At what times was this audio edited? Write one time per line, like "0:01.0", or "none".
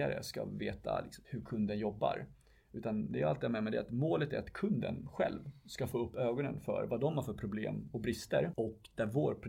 0:01.2